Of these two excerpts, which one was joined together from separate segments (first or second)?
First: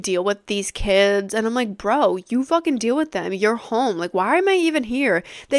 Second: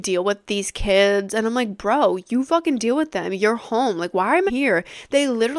second